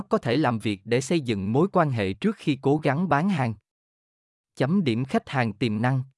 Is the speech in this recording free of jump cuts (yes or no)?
yes